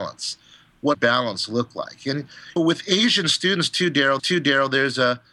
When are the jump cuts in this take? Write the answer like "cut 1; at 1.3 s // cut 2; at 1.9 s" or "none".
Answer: cut 1; at 0.9 s // cut 2; at 2.6 s // cut 3; at 4.2 s